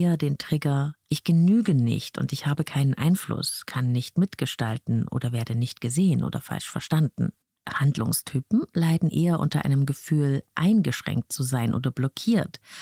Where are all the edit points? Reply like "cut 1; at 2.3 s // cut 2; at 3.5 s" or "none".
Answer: cut 1; at 7.5 s